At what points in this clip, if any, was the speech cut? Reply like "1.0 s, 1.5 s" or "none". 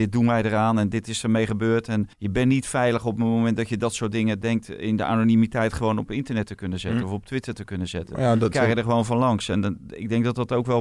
2.1 s, 8.5 s